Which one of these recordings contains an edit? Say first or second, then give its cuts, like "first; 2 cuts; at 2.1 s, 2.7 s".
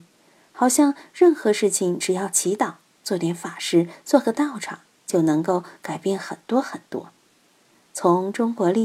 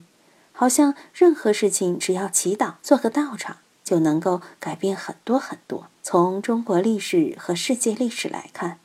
second; 2 cuts; at 2.8 s, 6.0 s